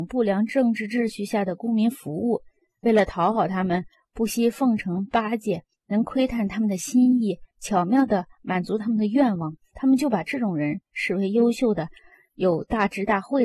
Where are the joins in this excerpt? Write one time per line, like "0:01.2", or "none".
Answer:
none